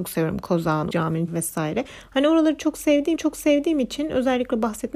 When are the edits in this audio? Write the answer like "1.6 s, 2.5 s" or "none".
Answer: 0.9 s, 1.3 s, 3.2 s